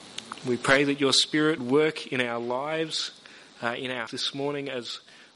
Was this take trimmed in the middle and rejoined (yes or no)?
yes